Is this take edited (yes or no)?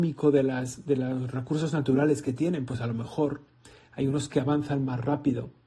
no